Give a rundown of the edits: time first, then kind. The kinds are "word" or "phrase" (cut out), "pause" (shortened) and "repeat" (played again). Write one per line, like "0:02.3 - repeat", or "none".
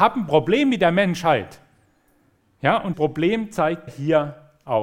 0:02.9 - word
0:03.9 - word